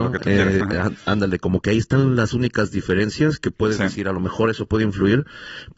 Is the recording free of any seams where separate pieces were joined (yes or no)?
yes